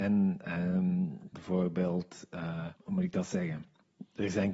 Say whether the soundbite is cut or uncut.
cut